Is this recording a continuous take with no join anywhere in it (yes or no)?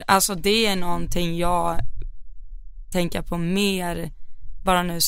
no